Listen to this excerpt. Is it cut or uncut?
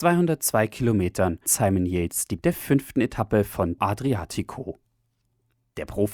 cut